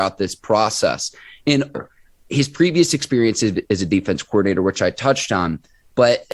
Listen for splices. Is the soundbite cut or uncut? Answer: cut